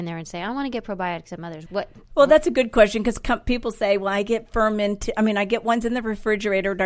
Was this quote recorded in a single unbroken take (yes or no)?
no